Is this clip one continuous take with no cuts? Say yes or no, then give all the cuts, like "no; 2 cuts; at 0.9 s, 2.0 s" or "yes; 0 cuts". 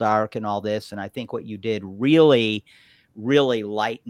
yes; 0 cuts